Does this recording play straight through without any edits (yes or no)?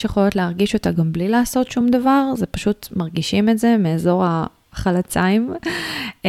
yes